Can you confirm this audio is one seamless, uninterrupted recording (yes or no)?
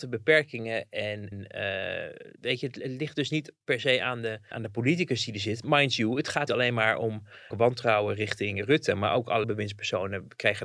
no